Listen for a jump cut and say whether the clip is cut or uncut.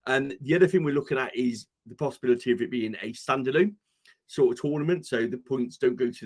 uncut